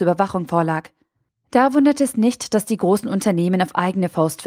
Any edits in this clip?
no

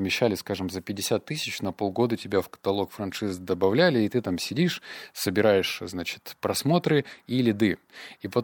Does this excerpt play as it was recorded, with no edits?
yes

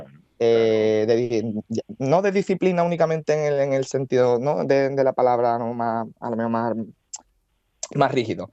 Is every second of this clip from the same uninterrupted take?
yes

